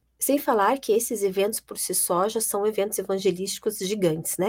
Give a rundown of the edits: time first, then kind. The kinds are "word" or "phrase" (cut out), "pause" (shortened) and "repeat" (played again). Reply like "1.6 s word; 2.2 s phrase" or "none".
none